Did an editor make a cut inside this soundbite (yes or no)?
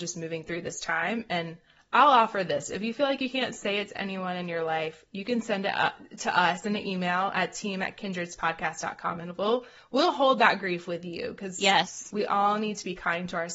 no